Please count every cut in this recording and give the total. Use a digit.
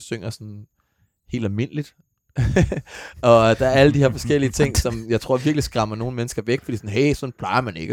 0